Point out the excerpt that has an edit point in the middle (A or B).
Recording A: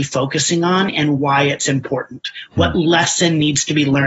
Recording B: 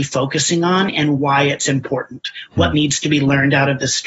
B